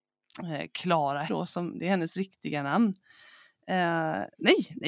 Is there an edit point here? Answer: yes; 1 cut; at 1.3 s

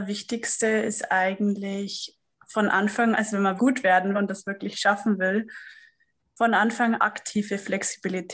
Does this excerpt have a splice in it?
yes; 4 cuts; at 3.1 s, 3.6 s, 4.1 s, 7.0 s

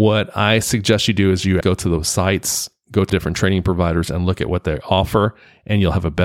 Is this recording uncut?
no; 2 cuts; at 1.6 s, 3.1 s

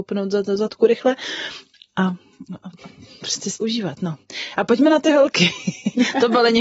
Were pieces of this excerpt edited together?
yes; 1 cut; at 3.6 s

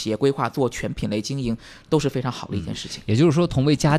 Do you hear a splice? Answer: no; 0 cuts

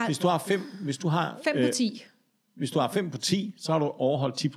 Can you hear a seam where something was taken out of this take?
no; 0 cuts

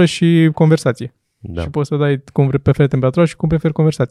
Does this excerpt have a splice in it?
no; 0 cuts

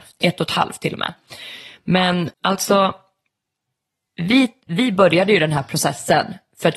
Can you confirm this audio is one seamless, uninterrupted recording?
no; 1 cut; at 2.3 s

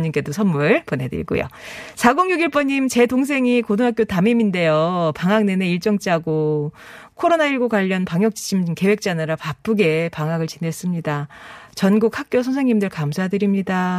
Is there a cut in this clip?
no; 0 cuts

